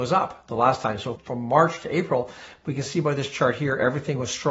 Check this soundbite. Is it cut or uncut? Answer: uncut